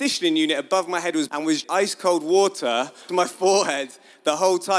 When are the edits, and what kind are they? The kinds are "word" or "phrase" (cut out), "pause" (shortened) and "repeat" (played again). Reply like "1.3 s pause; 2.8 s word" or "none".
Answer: 1.3 s word; 1.6 s word; 3.1 s word